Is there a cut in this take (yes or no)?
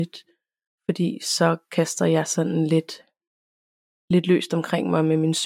no